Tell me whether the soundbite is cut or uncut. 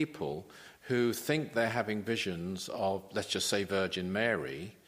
uncut